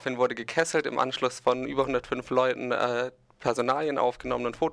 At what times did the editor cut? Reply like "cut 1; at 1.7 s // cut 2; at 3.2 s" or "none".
none